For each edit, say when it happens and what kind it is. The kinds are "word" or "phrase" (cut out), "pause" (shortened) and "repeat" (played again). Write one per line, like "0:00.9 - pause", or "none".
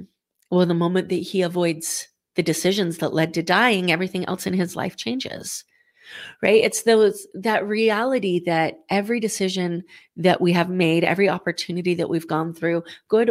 none